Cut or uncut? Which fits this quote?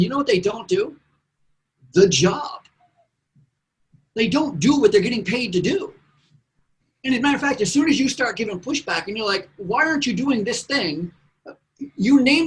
uncut